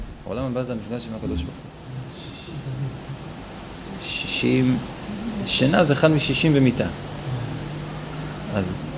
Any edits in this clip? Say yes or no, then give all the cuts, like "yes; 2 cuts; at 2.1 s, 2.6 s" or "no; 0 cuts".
no; 0 cuts